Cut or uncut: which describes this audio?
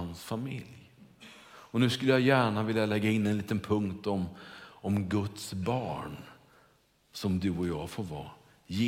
uncut